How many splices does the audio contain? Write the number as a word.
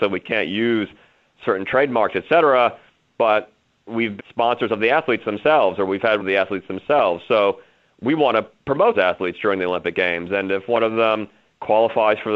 three